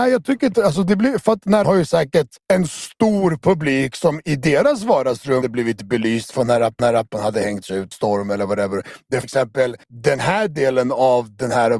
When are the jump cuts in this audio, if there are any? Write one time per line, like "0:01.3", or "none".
0:01.6
0:02.4
0:05.4
0:06.8
0:07.9
0:09.2
0:09.8